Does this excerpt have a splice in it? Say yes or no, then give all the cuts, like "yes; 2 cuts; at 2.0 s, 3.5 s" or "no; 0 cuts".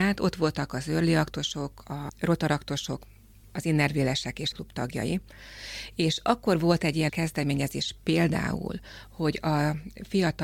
yes; 3 cuts; at 2.1 s, 4.5 s, 7.1 s